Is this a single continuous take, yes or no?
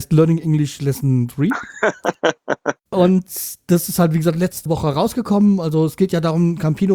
no